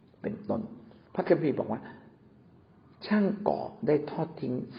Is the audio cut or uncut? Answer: cut